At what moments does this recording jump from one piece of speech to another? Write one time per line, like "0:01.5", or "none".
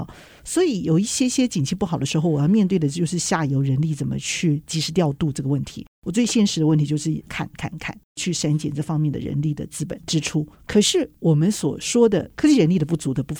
0:10.5